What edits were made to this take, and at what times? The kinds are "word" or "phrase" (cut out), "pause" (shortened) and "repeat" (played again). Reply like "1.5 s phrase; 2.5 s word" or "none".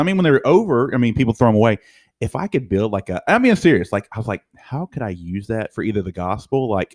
none